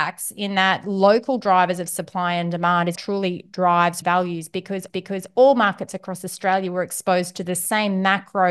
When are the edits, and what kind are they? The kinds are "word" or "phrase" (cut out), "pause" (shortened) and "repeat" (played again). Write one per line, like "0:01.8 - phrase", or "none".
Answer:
0:03.0 - word
0:04.0 - word
0:04.9 - repeat